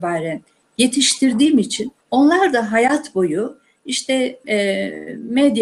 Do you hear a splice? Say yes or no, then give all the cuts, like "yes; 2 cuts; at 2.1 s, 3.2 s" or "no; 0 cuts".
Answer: yes; 1 cut; at 2.0 s